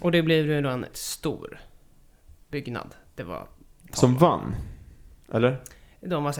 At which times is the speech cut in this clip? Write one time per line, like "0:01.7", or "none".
0:00.9